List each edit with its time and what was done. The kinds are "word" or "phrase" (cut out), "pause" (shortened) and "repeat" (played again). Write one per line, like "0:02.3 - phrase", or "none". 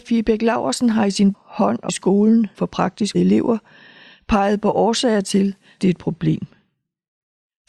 0:01.3 - word
0:01.9 - word
0:02.5 - word
0:03.1 - word
0:05.8 - word